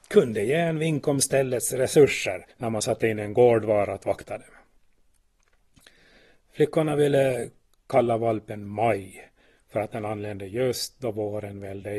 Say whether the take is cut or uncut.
cut